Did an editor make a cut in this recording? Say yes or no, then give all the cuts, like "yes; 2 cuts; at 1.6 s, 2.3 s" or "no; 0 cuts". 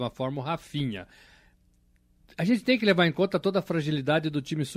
no; 0 cuts